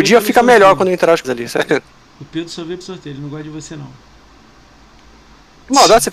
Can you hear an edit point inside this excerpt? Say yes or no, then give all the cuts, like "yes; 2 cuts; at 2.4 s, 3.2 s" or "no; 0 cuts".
yes; 2 cuts; at 1.2 s, 2.8 s